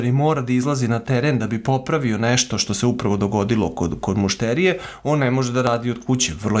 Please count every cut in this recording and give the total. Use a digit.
0